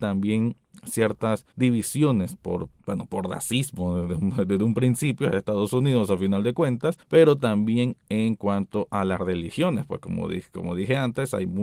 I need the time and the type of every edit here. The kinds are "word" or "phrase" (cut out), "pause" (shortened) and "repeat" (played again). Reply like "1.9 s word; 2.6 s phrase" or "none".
1.5 s pause; 2.8 s pause; 7.0 s pause